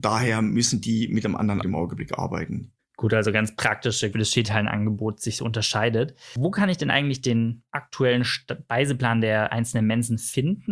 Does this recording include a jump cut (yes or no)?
yes